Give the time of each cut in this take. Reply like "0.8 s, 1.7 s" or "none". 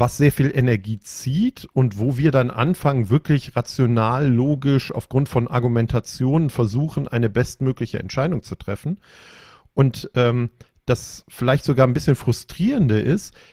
none